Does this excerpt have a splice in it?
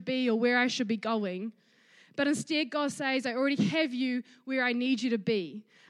no; 0 cuts

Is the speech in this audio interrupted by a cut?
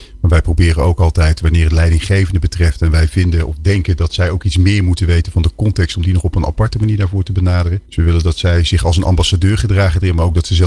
yes; 1 cut; at 7.8 s

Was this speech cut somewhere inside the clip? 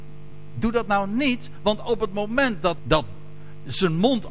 yes; 1 cut; at 2.8 s

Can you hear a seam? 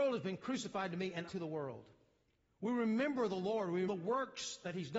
yes; 3 cuts; at 1.3 s, 2.2 s, 3.8 s

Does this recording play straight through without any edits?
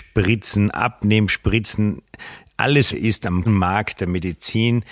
no; 2 cuts; at 2.9 s, 3.5 s

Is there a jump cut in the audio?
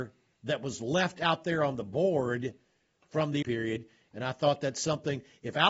yes; 1 cut; at 3.4 s

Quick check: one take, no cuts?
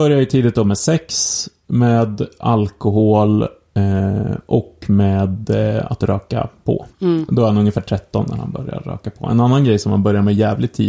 no; 1 cut; at 6.9 s

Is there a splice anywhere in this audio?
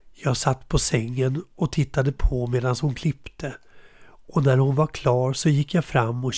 no; 0 cuts

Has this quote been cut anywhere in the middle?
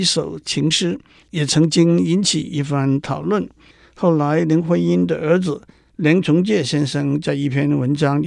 no; 0 cuts

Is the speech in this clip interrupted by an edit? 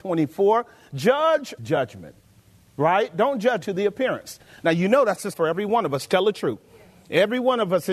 yes; 3 cuts; at 1.6 s, 3.6 s, 5.3 s

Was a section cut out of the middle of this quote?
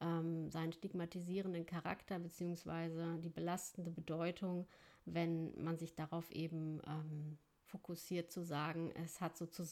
yes; 1 cut; at 7.6 s

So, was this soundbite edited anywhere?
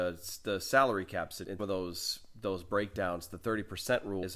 yes; 1 cut; at 1.6 s

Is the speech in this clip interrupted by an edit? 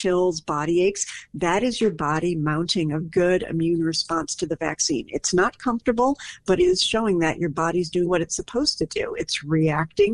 yes; 3 cuts; at 3.0 s, 6.6 s, 8.1 s

